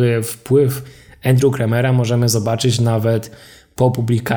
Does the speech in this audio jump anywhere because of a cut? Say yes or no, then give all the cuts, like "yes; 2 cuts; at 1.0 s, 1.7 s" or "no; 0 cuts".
no; 0 cuts